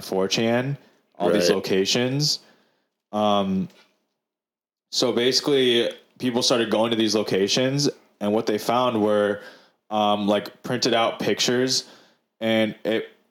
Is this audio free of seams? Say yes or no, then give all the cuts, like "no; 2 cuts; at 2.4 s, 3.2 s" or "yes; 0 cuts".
yes; 0 cuts